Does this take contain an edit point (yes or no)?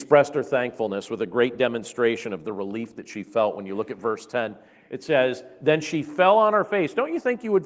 no